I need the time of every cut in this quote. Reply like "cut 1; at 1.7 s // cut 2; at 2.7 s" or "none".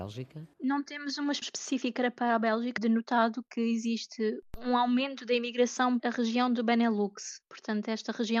cut 1; at 1.4 s // cut 2; at 2.8 s // cut 3; at 6.0 s